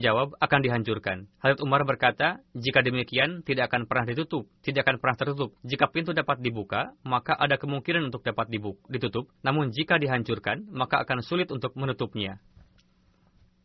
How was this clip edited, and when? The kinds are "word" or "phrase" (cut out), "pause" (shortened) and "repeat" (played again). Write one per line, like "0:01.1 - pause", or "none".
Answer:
0:01.3 - pause
0:02.5 - pause
0:04.6 - pause
0:05.6 - pause
0:09.4 - pause